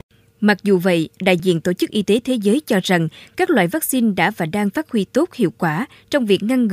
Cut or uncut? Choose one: uncut